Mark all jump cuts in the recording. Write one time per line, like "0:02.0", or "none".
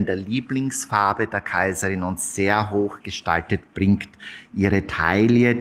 none